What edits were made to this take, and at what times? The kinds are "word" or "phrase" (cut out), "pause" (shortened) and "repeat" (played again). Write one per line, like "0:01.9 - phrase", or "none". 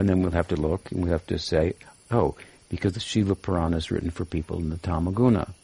none